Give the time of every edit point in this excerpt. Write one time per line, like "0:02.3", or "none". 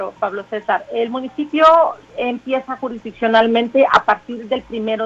0:02.0

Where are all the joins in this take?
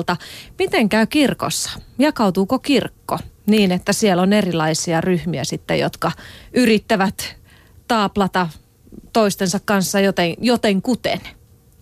0:09.1

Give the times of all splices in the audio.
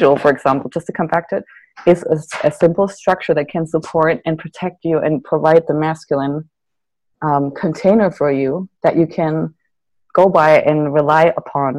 none

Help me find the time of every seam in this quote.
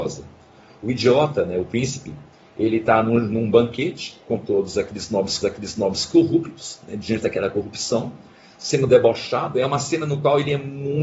0:05.4

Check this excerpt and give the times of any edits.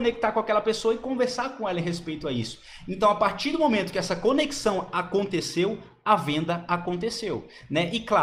none

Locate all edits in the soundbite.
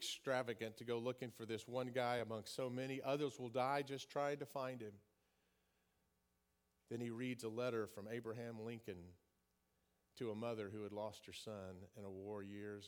none

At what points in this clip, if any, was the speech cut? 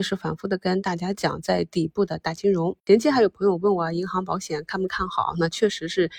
0:02.8

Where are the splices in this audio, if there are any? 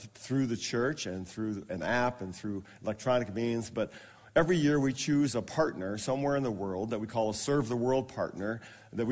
none

